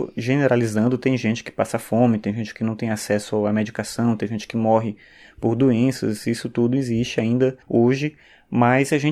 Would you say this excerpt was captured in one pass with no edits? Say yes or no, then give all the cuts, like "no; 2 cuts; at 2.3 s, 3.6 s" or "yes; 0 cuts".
no; 1 cut; at 7.6 s